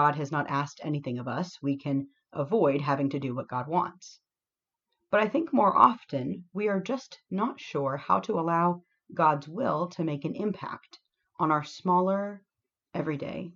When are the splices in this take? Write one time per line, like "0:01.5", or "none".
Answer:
none